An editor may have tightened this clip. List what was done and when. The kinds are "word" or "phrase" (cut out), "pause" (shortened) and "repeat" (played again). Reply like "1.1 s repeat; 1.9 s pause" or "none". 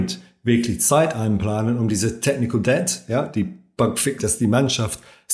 4.2 s phrase